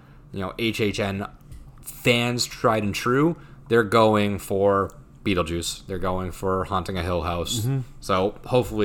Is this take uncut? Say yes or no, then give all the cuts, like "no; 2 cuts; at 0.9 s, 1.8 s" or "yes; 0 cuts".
no; 1 cut; at 1.7 s